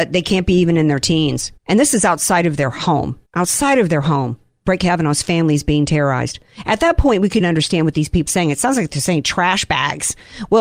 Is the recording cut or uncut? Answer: cut